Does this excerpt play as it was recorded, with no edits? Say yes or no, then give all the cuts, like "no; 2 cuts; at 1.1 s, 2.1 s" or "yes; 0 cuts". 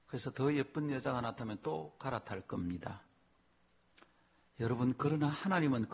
yes; 0 cuts